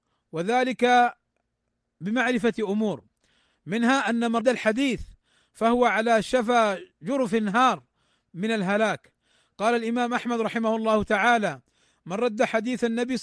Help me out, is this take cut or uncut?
cut